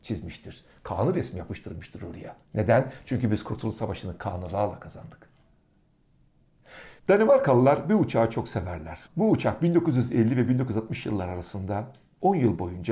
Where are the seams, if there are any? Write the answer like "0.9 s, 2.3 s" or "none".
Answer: 2.4 s, 7.0 s, 9.1 s